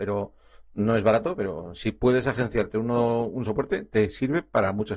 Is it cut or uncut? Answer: cut